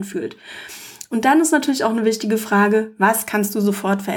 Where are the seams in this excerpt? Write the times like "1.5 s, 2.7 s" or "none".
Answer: none